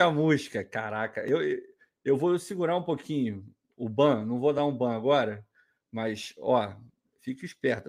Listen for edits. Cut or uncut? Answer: uncut